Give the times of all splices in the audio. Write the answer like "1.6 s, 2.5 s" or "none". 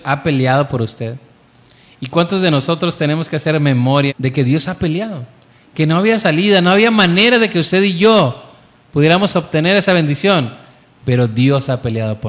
4.1 s